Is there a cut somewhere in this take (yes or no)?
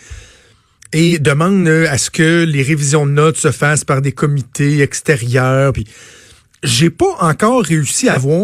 no